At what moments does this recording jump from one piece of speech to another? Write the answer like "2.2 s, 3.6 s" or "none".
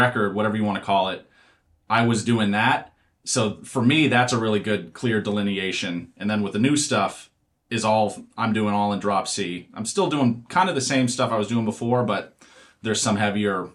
none